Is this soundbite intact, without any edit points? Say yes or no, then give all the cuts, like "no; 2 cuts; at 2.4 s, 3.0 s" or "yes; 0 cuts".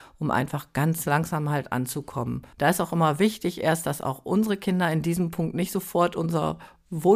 no; 1 cut; at 2.5 s